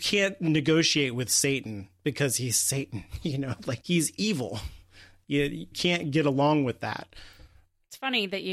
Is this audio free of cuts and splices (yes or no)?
no